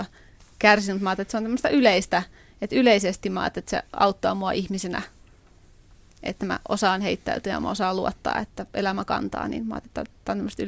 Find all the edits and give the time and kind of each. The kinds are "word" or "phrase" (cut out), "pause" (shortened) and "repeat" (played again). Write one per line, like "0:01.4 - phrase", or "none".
none